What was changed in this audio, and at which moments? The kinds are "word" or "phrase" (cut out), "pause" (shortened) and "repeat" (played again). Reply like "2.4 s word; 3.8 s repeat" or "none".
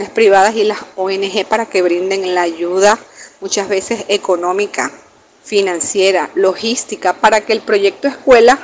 5.2 s pause